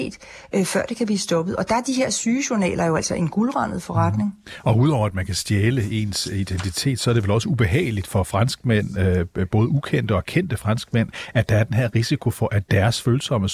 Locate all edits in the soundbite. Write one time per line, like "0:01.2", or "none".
none